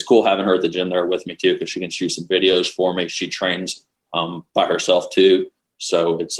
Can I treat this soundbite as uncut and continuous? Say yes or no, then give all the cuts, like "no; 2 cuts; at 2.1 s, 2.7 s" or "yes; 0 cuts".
no; 1 cut; at 4.5 s